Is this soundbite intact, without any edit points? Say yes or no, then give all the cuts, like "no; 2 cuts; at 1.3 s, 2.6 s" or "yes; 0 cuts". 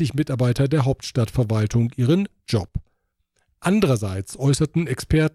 yes; 0 cuts